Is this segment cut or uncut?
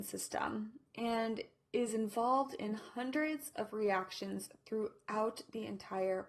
uncut